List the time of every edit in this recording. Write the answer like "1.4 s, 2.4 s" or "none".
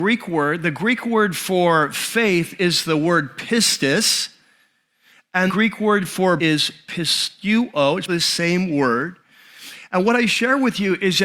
5.5 s, 6.4 s, 8.1 s

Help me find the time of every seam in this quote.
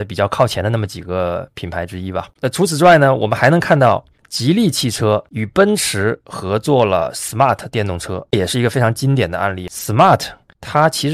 none

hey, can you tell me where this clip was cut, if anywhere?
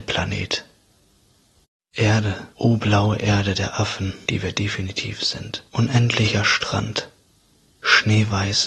2.5 s, 4.2 s, 5.7 s

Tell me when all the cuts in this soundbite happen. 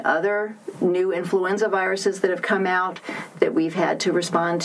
none

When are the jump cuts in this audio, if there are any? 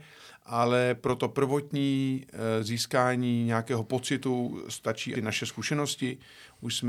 5.1 s

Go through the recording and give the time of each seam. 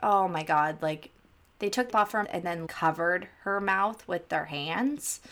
1.9 s, 2.2 s, 2.7 s

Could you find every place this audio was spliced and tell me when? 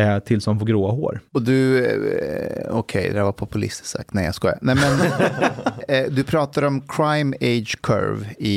1.3 s

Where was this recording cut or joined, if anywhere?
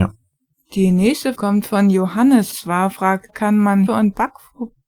1.3 s, 2.5 s, 3.3 s, 3.9 s

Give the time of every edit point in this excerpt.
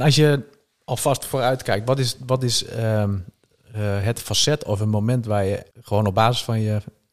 5.7 s

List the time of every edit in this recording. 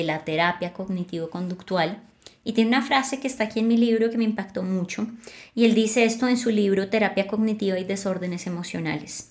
none

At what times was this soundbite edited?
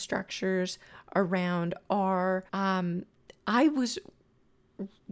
2.5 s

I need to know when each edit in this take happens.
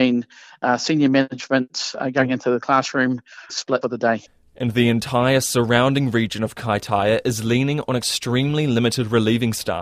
3.5 s, 3.8 s

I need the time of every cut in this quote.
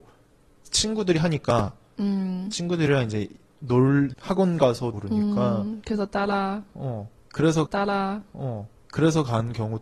4.1 s, 4.9 s, 7.7 s

